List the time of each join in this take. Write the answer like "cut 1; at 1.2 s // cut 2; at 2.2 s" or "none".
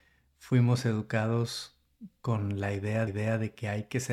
cut 1; at 3.1 s